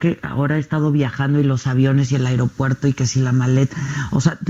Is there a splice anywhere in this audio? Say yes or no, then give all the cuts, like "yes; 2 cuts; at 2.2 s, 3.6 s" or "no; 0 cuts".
no; 0 cuts